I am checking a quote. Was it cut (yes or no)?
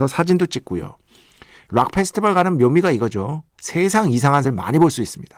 yes